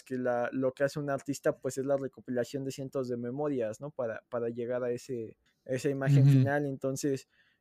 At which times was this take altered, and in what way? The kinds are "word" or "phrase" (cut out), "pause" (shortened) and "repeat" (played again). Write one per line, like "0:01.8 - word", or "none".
0:05.5 - pause